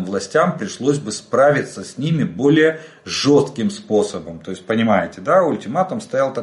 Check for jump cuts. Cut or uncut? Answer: uncut